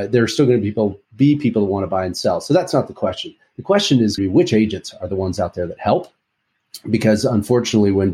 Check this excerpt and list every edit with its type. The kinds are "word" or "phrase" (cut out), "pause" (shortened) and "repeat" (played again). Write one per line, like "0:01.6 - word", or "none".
0:01.0 - pause
0:04.2 - word